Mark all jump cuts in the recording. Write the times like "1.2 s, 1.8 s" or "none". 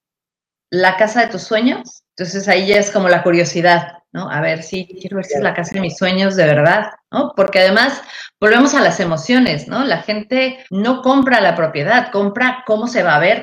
2.1 s, 7.0 s, 10.7 s